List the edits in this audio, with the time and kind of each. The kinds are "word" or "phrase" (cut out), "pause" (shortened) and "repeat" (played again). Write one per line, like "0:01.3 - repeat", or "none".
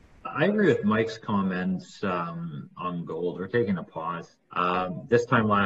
0:04.4 - pause

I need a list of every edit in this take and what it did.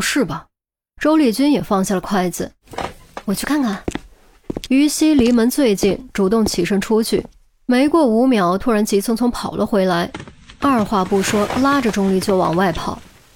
none

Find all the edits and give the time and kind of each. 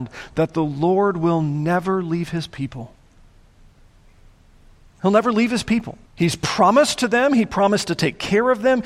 0:06.1 - pause

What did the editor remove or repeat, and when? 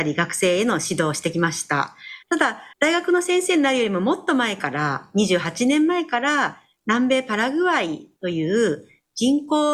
0:02.2 - pause
0:02.7 - pause

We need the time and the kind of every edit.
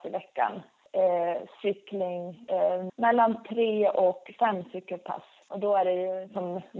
0:02.9 - word

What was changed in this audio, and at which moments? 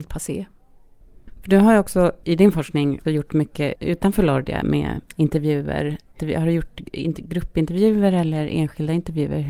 none

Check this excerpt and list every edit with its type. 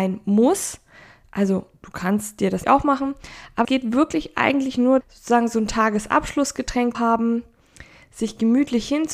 0:02.6 - word
0:03.6 - word
0:05.0 - word
0:06.9 - word

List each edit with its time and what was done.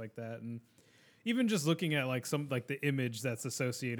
none

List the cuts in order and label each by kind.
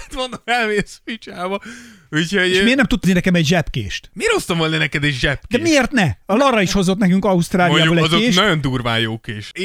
0:03.0 - word

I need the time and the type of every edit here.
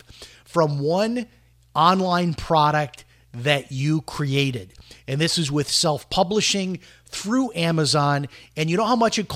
none

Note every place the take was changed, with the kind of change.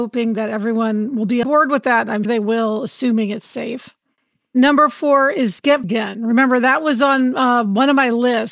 0:01.4 - word
0:02.2 - word
0:05.8 - word

